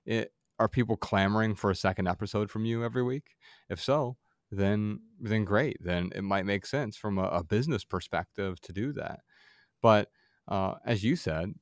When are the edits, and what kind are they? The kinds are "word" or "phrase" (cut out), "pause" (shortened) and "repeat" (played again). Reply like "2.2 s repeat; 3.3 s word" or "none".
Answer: none